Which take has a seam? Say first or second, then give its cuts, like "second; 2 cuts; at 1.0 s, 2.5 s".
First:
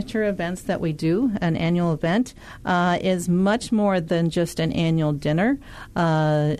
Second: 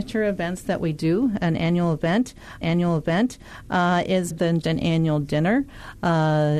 second; 3 cuts; at 2.6 s, 4.3 s, 4.6 s